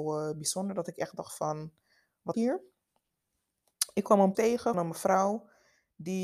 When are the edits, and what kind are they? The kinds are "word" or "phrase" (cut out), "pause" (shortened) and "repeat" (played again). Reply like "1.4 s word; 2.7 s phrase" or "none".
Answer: 2.3 s word; 4.3 s word; 4.7 s word